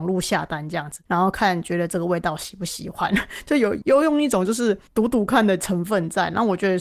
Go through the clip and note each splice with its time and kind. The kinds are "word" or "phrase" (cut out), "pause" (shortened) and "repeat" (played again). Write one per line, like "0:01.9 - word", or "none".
0:01.1 - pause
0:04.9 - pause